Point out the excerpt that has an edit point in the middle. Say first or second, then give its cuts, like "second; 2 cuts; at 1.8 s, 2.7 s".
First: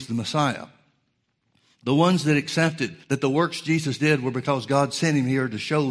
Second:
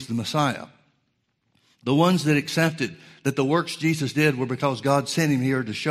first; 1 cut; at 3.0 s